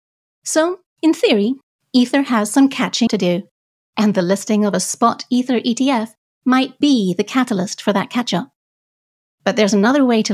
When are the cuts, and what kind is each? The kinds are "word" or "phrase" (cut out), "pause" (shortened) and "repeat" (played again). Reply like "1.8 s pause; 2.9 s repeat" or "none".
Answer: 3.1 s word; 6.8 s word